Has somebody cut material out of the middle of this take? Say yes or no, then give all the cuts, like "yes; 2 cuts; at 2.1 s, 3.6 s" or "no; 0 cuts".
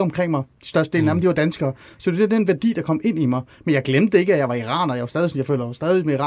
no; 0 cuts